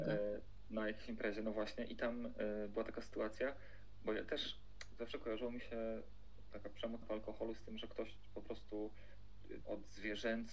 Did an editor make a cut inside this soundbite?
yes; 3 cuts; at 4.9 s, 7.0 s, 9.6 s

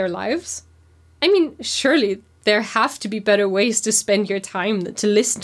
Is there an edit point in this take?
no; 0 cuts

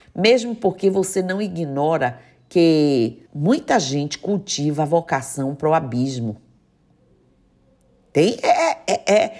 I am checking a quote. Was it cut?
yes; 1 cut; at 3.3 s

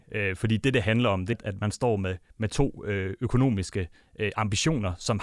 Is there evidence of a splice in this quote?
yes; 1 cut; at 1.3 s

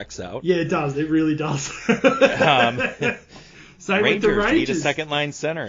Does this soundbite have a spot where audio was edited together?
no; 0 cuts

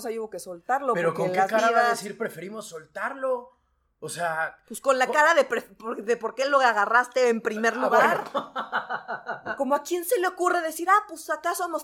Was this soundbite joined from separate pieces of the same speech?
no; 0 cuts

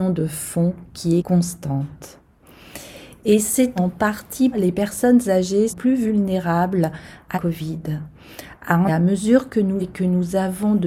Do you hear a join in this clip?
yes; 7 cuts; at 1.2 s, 3.8 s, 4.5 s, 5.7 s, 7.3 s, 8.9 s, 9.8 s

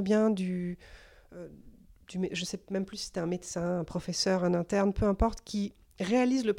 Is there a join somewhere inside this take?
no; 0 cuts

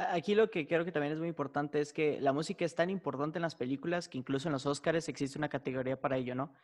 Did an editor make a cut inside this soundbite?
no; 0 cuts

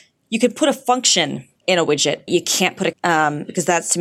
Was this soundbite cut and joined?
yes; 3 cuts; at 1.6 s, 2.3 s, 2.9 s

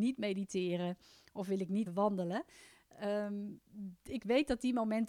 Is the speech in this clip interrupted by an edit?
yes; 1 cut; at 1.9 s

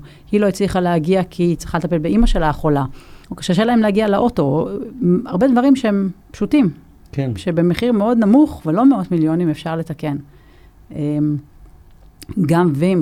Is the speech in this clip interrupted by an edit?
yes; 2 cuts; at 3.2 s, 6.2 s

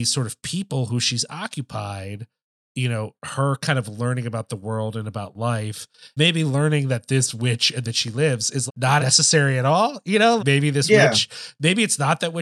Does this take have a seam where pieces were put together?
yes; 5 cuts; at 6.2 s, 7.8 s, 8.7 s, 9.0 s, 10.4 s

